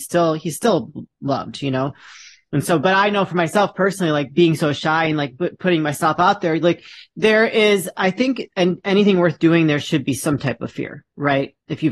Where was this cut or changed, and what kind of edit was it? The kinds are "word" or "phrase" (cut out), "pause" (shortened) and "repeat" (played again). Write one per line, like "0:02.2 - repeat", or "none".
none